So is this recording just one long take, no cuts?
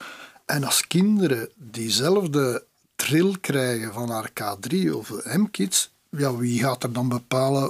yes; 0 cuts

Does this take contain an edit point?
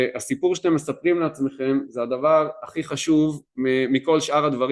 no; 0 cuts

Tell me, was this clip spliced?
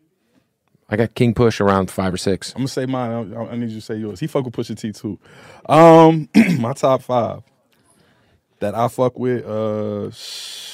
no; 0 cuts

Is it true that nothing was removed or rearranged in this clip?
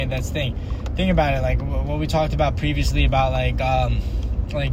yes; 0 cuts

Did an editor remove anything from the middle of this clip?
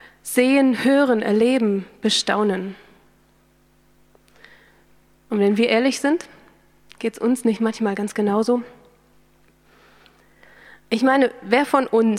no; 0 cuts

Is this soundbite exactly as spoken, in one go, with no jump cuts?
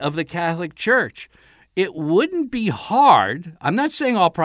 yes; 0 cuts

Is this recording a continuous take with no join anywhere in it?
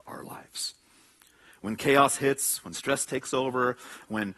yes; 0 cuts

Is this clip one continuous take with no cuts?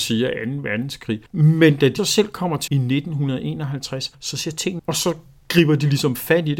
no; 5 cuts; at 1.3 s, 2.0 s, 2.7 s, 4.1 s, 4.8 s

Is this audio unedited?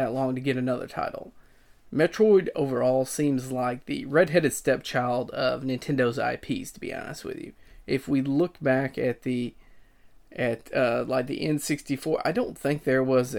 yes; 0 cuts

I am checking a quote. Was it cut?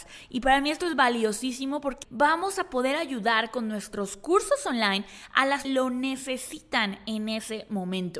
yes; 2 cuts; at 2.0 s, 5.6 s

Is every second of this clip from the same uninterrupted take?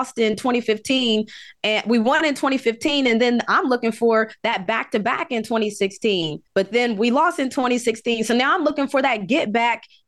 no; 1 cut; at 6.5 s

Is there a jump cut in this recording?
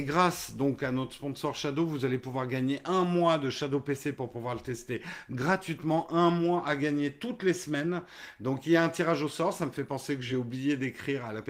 no; 0 cuts

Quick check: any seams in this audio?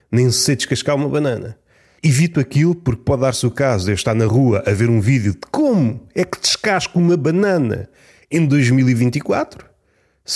no; 0 cuts

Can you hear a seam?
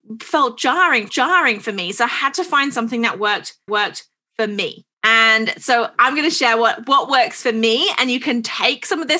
yes; 3 cuts; at 1.1 s, 3.7 s, 4.9 s

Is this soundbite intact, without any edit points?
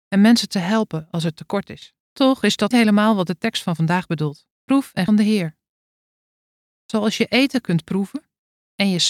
no; 4 cuts; at 2.0 s, 2.7 s, 4.5 s, 5.1 s

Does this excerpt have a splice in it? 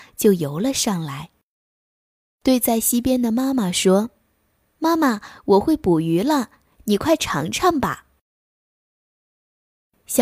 no; 0 cuts

